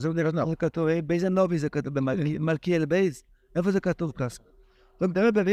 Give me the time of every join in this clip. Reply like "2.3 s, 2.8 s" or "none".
none

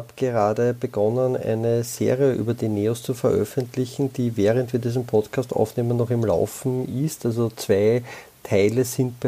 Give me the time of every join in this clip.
none

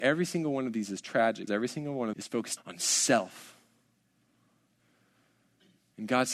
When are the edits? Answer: 1.5 s, 2.1 s, 2.6 s

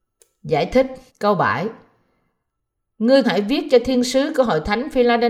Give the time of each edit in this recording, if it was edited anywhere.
1.1 s, 3.2 s

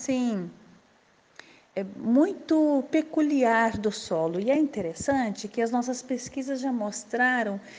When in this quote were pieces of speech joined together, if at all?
none

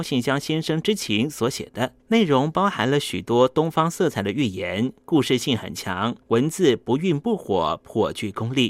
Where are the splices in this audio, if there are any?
2.0 s, 6.2 s

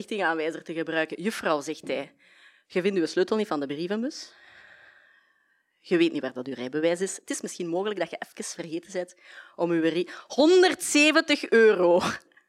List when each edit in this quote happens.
none

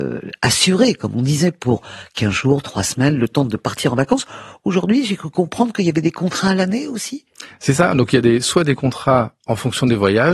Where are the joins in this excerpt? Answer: none

